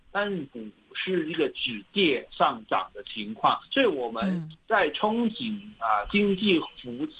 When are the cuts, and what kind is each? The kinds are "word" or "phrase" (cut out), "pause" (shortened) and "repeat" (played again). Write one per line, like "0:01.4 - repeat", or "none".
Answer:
0:03.7 - pause